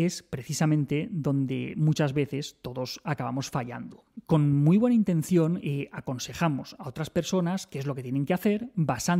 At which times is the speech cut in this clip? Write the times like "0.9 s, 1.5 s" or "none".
none